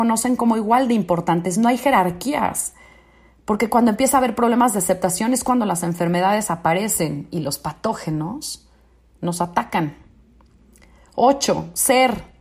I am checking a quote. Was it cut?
no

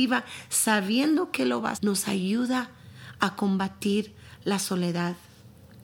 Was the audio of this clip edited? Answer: yes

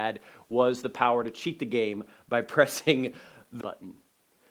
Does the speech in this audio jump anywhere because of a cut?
yes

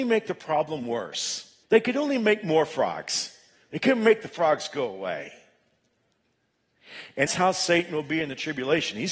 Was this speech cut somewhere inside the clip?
yes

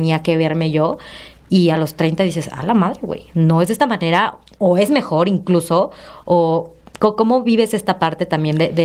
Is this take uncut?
yes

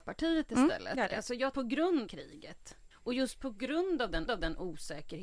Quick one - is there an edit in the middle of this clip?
yes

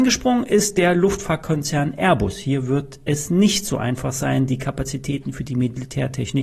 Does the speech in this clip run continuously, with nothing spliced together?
yes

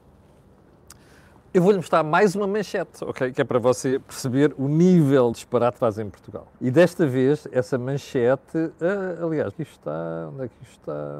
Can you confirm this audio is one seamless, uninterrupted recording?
no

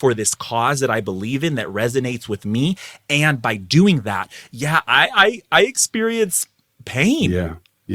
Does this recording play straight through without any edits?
yes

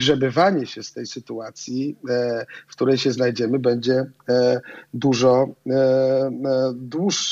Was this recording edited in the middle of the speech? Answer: no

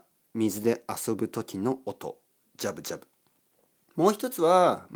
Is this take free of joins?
yes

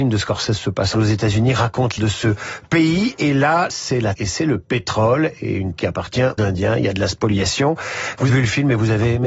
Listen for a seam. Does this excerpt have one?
yes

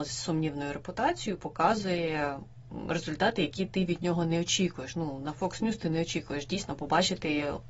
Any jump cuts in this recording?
no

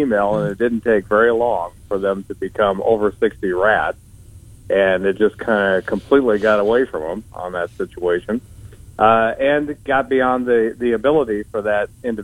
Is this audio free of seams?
yes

